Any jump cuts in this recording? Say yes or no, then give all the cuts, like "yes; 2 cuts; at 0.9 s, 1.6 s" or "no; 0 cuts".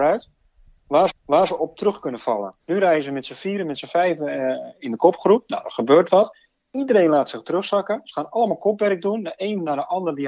yes; 2 cuts; at 1.1 s, 2.6 s